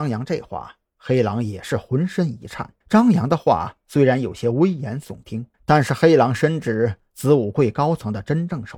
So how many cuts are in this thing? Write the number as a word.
two